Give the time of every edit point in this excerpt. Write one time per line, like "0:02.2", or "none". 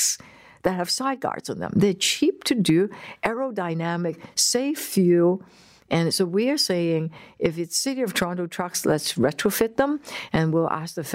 none